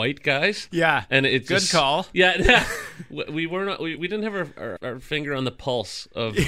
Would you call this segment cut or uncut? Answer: cut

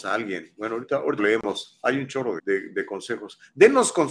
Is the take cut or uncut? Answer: cut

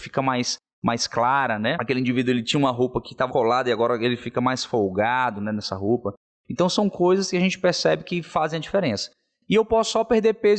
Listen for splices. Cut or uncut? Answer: cut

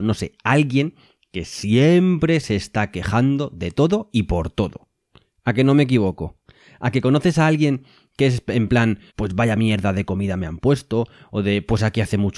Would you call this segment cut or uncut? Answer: cut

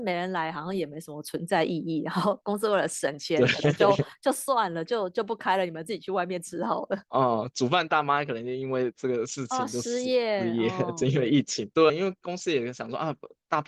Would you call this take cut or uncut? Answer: cut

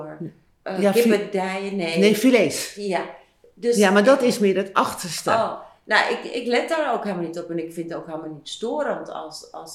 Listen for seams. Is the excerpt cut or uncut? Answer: uncut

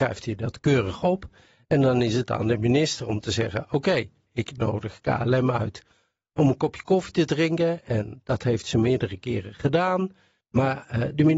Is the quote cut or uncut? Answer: uncut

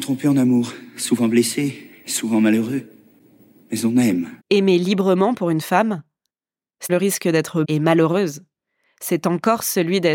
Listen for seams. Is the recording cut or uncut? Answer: cut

